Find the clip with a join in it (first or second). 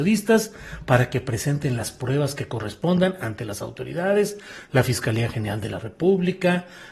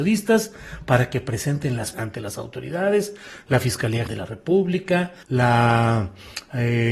second